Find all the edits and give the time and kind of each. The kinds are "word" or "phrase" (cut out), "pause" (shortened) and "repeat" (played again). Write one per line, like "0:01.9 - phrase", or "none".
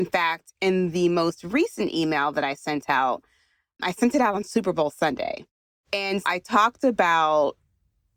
0:06.2 - word